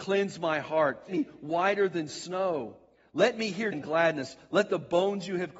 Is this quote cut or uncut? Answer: cut